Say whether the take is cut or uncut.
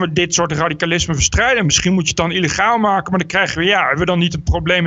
uncut